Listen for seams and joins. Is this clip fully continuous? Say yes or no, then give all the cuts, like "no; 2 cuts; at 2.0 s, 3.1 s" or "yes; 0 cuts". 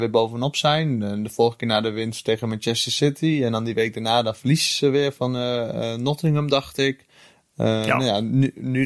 yes; 0 cuts